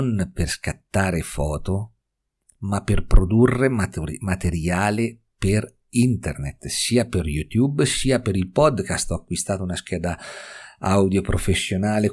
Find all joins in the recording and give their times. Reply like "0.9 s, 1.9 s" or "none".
none